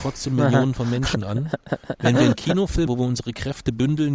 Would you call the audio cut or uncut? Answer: cut